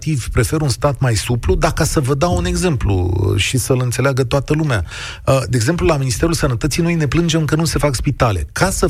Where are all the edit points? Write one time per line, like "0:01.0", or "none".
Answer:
none